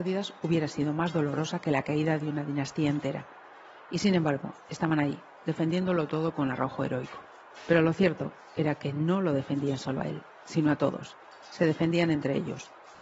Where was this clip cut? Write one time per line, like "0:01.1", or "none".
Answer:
none